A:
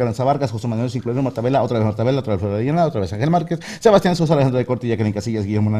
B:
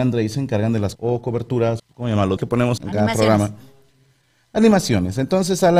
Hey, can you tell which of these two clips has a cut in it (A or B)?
B